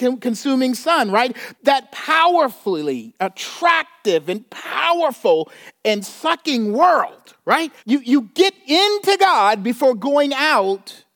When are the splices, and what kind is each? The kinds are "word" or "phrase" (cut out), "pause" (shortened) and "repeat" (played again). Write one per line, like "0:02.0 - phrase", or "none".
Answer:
0:01.6 - pause
0:07.8 - pause